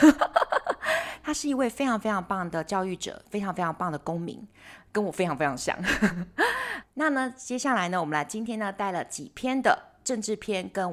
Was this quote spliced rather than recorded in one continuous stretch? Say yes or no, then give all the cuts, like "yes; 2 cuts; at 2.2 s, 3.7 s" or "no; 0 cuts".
yes; 1 cut; at 6.8 s